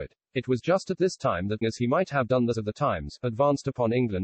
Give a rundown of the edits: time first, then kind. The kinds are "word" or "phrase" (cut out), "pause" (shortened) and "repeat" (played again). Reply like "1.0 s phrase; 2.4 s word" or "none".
1.6 s phrase; 2.5 s word